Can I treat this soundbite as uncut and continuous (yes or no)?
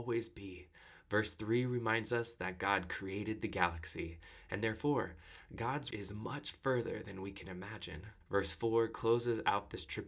no